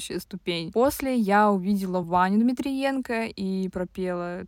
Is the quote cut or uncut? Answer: uncut